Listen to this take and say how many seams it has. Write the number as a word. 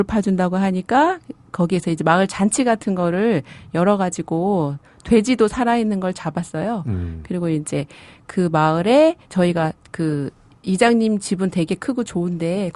one